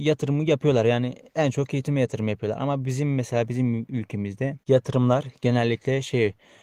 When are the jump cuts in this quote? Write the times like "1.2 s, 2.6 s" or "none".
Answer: none